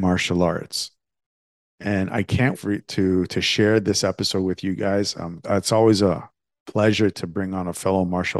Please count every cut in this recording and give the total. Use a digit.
2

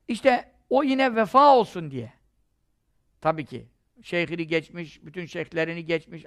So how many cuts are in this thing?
0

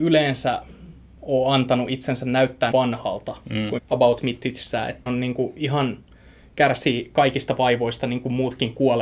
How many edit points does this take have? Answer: 3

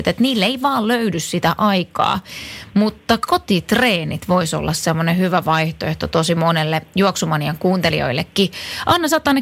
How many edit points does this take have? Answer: 0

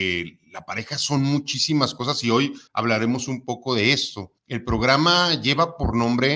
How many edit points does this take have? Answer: 2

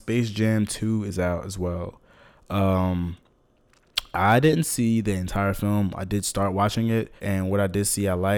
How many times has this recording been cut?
1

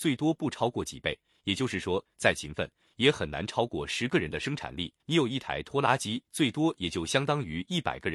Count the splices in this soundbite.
2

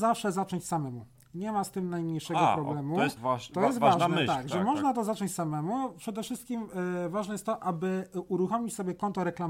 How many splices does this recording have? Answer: 1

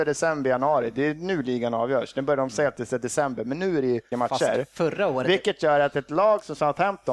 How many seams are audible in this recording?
1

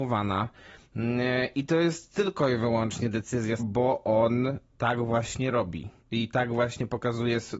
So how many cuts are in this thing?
2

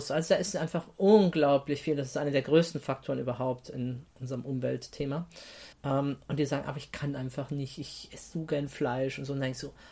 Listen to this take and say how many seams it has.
1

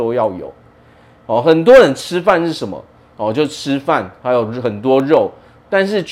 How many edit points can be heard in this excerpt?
0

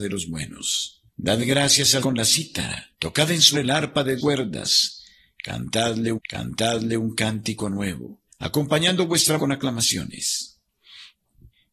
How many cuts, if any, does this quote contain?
8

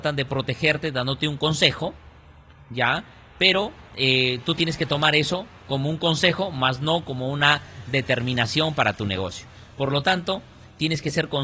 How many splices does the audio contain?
0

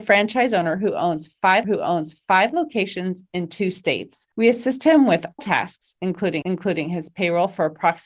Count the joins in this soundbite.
4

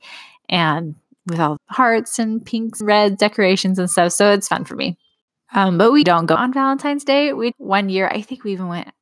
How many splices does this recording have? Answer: 6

